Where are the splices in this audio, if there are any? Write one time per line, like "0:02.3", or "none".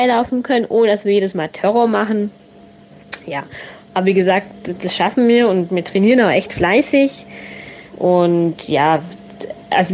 0:07.9